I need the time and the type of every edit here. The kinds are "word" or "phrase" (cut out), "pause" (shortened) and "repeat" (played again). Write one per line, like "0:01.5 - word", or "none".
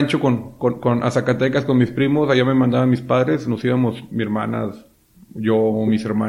none